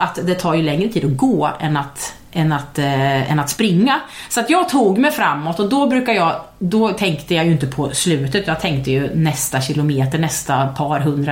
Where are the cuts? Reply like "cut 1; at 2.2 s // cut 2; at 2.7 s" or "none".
none